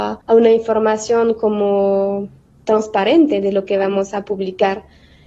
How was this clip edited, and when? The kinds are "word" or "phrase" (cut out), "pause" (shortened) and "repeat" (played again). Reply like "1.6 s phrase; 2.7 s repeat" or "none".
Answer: none